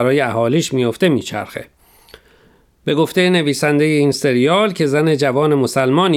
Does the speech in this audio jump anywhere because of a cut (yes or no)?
no